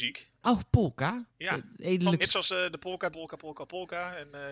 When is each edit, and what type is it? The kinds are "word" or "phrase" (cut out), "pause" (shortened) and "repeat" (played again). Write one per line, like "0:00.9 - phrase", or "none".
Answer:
0:01.3 - pause
0:02.2 - word
0:03.1 - phrase

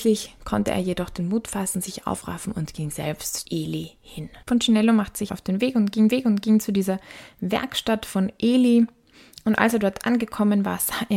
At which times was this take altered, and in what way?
0:03.4 - word
0:04.4 - pause
0:05.3 - word
0:06.1 - repeat

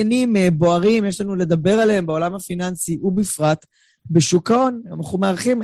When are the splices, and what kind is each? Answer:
none

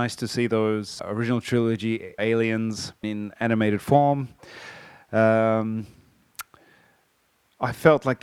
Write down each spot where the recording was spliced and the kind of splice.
0:01.0 - word
0:02.2 - word
0:03.0 - word

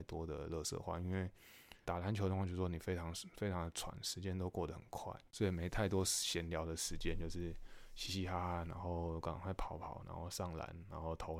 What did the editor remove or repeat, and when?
0:01.8 - word
0:05.3 - pause

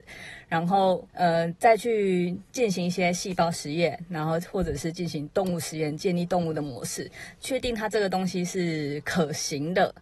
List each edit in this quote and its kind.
0:01.1 - pause

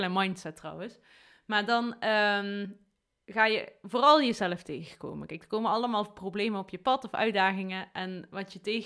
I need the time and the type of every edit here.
none

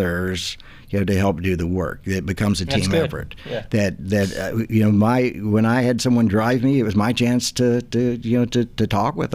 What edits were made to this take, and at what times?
none

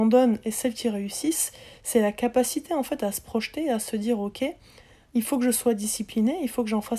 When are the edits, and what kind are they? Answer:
none

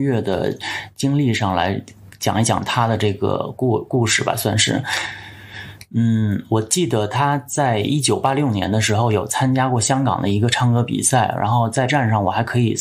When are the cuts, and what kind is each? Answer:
0:11.9 - word

